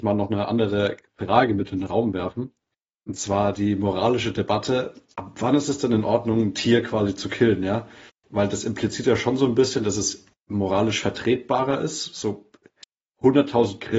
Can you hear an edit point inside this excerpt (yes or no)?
no